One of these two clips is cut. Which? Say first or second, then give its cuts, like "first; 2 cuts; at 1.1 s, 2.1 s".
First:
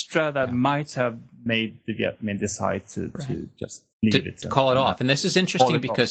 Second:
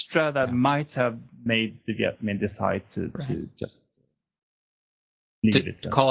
first; 1 cut; at 3.9 s